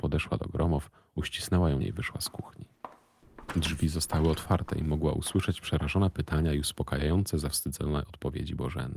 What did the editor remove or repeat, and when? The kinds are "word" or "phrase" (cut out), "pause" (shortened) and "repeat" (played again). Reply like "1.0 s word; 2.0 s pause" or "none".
1.8 s word

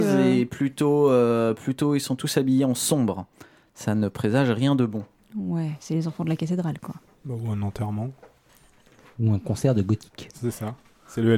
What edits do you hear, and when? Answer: none

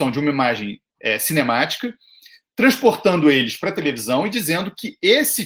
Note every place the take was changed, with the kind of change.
none

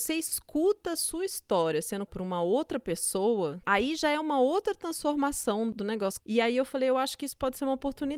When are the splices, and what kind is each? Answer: 2.1 s word

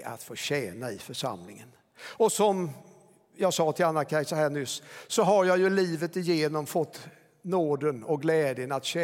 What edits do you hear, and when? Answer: none

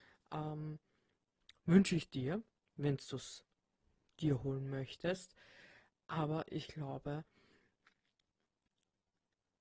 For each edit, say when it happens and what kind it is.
none

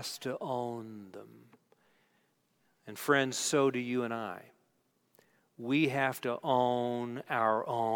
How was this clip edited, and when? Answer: none

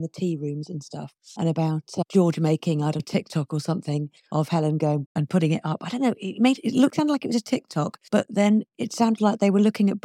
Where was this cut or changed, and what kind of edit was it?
3.0 s word; 5.1 s word; 6.9 s word

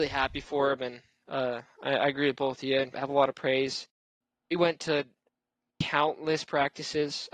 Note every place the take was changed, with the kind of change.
2.9 s word

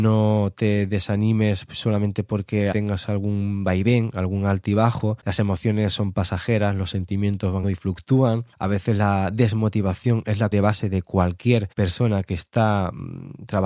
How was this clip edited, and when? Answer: 2.7 s phrase; 5.2 s pause; 7.6 s word; 8.5 s pause; 10.5 s word; 11.7 s pause

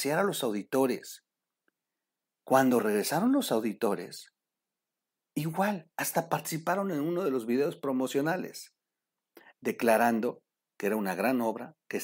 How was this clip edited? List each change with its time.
none

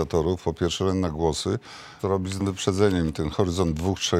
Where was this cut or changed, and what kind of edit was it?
2.0 s word; 2.4 s word

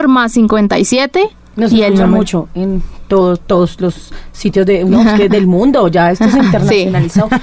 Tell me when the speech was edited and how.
none

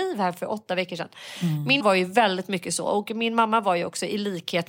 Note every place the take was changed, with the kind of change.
1.8 s word

